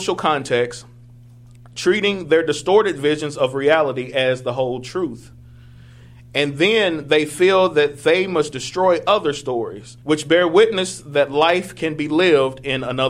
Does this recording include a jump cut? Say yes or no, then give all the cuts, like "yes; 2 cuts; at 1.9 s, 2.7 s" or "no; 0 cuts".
yes; 1 cut; at 10.0 s